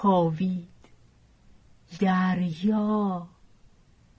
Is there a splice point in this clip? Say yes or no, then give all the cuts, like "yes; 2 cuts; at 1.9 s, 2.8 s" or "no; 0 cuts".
yes; 1 cut; at 1.9 s